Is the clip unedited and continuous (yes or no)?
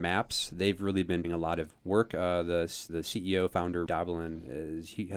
no